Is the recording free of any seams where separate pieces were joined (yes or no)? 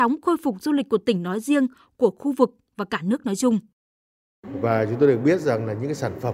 yes